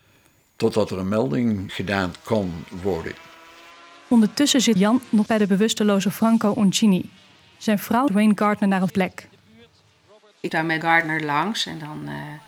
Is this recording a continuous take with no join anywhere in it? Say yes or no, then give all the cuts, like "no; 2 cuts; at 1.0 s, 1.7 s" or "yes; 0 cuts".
no; 7 cuts; at 1.7 s, 4.8 s, 5.3 s, 8.1 s, 8.9 s, 10.5 s, 10.8 s